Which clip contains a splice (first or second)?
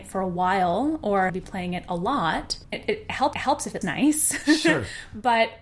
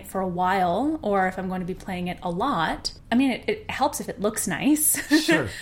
first